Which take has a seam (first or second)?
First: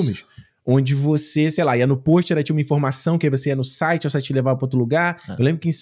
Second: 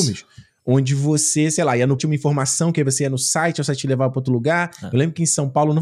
second